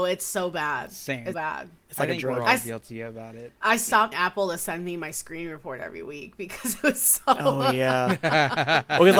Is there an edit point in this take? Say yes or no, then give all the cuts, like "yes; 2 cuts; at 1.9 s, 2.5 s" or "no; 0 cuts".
yes; 3 cuts; at 1.3 s, 3.6 s, 4.1 s